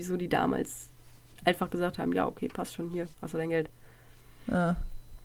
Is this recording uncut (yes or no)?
yes